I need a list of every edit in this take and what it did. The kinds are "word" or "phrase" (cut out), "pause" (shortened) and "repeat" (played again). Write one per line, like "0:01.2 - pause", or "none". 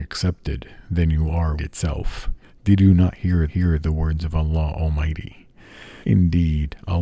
0:01.6 - phrase
0:03.5 - repeat
0:06.0 - pause